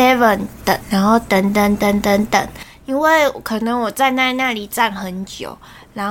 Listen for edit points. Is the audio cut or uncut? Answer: uncut